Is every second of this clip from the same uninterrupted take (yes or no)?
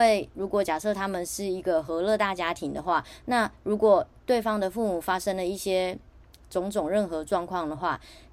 yes